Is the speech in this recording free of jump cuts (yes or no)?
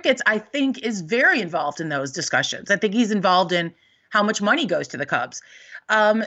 yes